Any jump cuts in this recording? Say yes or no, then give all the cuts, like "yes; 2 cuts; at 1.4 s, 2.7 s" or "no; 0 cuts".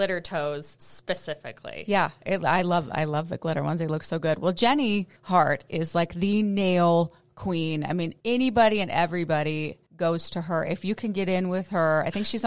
yes; 3 cuts; at 5.2 s, 8.2 s, 9.9 s